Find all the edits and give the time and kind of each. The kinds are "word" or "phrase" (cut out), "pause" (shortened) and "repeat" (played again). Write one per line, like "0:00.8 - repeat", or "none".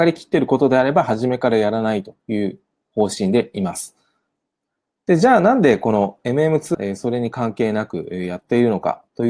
0:06.7 - word